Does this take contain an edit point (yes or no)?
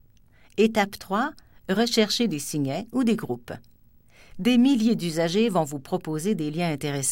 no